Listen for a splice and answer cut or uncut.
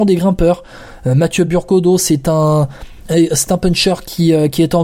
uncut